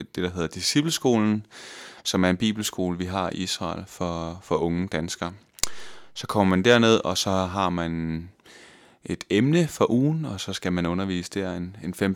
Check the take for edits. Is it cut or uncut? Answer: uncut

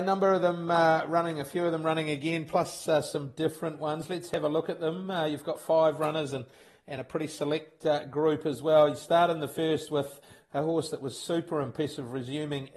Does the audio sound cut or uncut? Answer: uncut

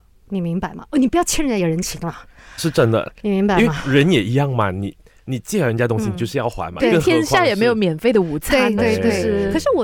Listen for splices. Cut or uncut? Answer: cut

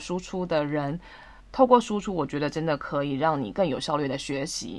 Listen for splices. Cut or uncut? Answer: cut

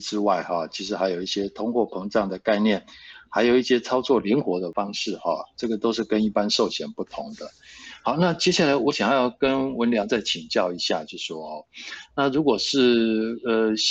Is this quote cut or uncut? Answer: cut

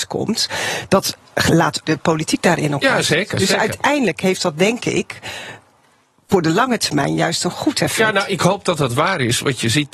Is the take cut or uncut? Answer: cut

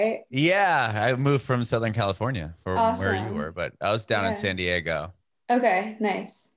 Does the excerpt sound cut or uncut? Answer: uncut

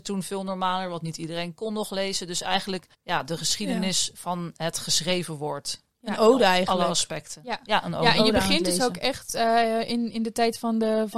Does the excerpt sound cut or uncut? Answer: cut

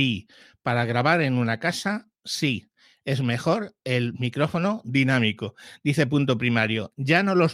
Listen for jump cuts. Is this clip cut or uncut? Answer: uncut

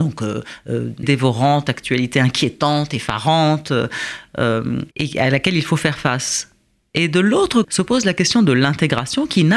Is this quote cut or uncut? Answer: cut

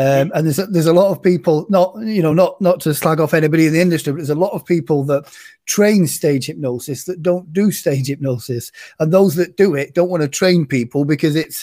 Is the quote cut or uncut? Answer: uncut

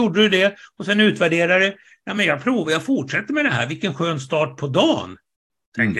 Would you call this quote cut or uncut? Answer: uncut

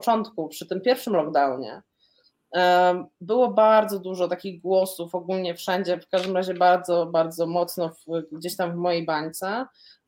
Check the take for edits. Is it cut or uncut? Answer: uncut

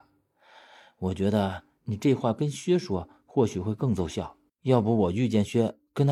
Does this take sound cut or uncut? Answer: cut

